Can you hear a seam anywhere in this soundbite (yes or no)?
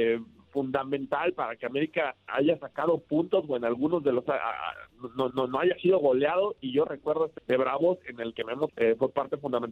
yes